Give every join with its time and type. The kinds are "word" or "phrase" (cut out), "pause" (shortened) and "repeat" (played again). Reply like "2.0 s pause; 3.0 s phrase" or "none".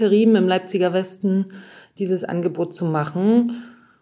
none